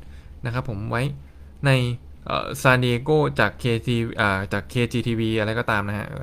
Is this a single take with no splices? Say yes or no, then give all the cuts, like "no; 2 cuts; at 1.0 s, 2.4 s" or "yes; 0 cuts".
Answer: yes; 0 cuts